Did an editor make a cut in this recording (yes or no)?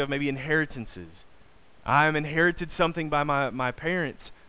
no